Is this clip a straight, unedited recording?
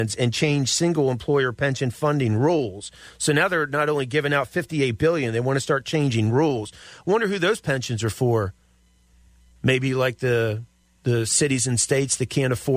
yes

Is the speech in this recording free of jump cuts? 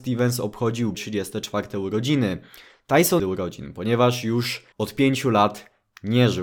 no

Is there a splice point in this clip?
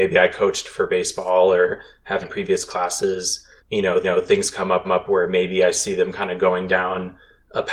yes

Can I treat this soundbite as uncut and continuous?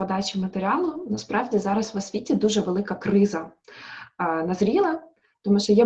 yes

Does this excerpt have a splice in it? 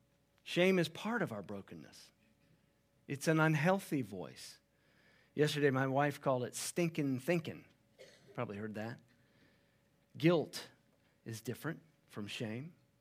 no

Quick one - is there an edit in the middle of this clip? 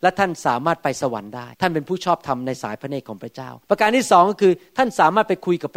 yes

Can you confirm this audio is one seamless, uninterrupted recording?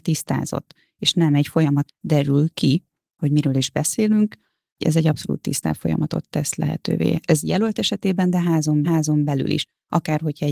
no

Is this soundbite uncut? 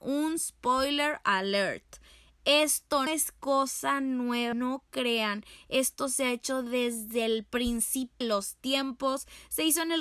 no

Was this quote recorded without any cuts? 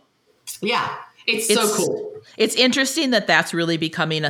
yes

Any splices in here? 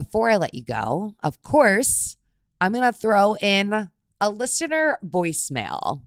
no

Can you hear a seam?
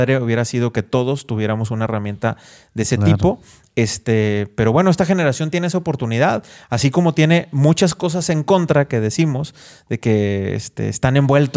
no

